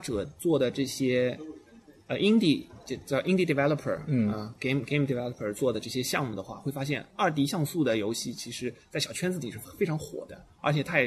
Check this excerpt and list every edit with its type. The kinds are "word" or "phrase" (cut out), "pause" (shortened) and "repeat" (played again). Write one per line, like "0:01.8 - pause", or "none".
none